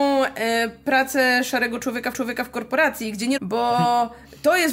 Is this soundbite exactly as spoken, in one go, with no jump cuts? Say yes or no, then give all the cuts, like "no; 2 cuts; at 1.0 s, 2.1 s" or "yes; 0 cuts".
no; 2 cuts; at 2.1 s, 3.4 s